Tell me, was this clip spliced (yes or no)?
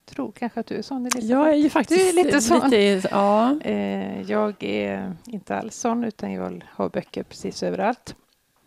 yes